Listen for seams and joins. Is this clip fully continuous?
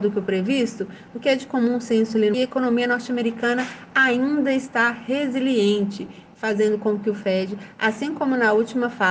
no; 1 cut; at 2.3 s

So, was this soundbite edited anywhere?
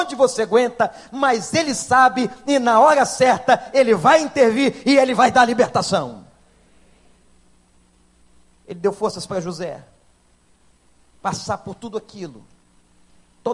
no; 0 cuts

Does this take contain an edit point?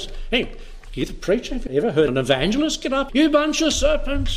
yes; 3 cuts; at 1.7 s, 2.1 s, 3.1 s

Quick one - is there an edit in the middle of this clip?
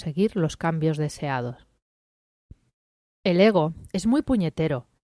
no; 0 cuts

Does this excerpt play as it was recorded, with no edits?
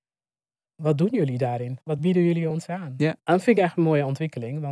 yes; 0 cuts

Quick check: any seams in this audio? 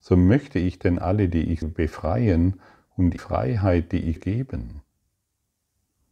yes; 4 cuts; at 1.3 s, 1.6 s, 3.2 s, 4.2 s

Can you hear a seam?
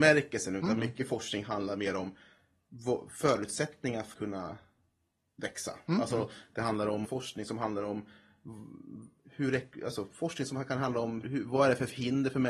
yes; 3 cuts; at 4.1 s, 7.0 s, 11.2 s

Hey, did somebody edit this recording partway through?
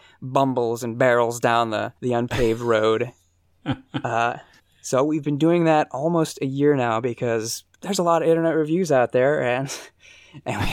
yes; 3 cuts; at 2.0 s, 4.6 s, 7.7 s

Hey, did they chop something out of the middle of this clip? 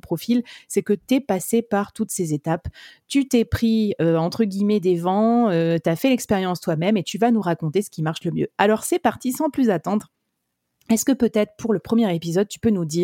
no; 0 cuts

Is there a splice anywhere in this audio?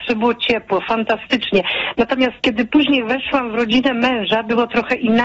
no; 0 cuts

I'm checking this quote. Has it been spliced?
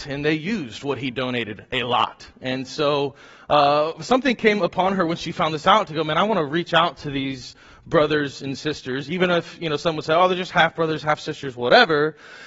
no; 0 cuts

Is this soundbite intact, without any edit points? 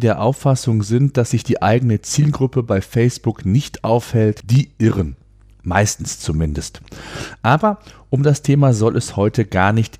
yes; 0 cuts

